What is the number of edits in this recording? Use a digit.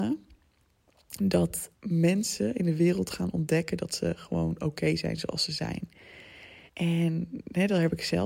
2